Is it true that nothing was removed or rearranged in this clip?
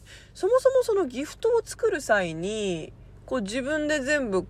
yes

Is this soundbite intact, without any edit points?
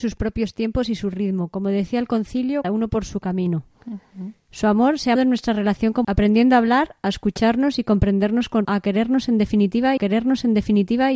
no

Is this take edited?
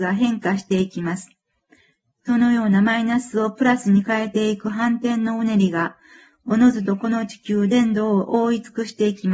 no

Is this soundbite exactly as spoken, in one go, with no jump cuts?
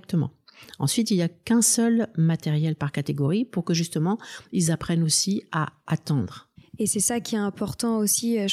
yes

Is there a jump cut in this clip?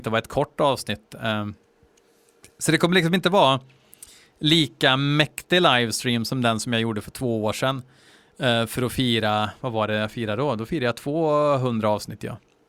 no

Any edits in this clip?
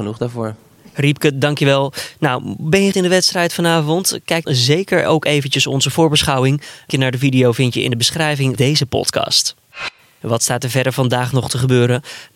yes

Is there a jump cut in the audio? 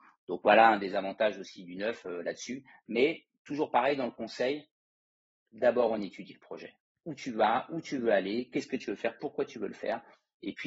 no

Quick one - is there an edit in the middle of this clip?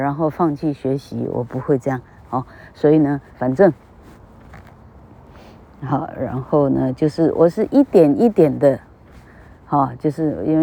yes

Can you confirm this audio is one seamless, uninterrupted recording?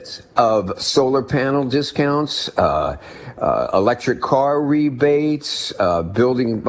yes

